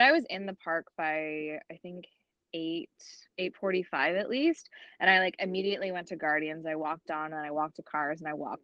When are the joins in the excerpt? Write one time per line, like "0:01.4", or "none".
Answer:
0:03.3